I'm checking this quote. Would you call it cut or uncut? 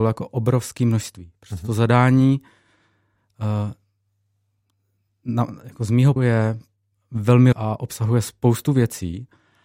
cut